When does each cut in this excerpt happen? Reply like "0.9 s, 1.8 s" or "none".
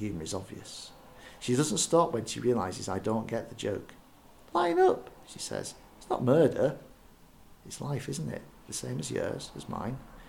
none